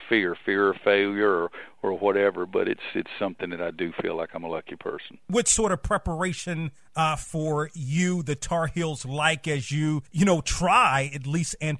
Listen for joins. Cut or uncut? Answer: cut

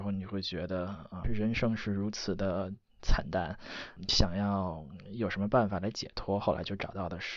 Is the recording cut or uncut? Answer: cut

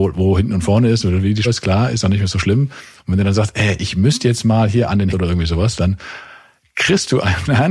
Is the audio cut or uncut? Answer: cut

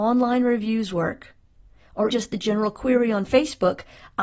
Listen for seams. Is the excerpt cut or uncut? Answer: cut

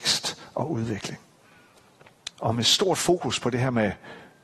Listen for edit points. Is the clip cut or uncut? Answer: cut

